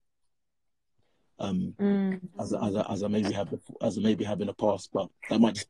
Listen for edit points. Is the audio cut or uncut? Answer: uncut